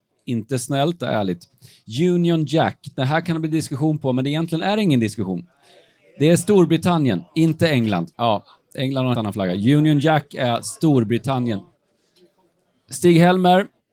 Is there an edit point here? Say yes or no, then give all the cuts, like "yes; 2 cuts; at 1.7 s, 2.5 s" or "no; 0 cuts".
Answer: yes; 4 cuts; at 1.0 s, 7.3 s, 8.1 s, 9.1 s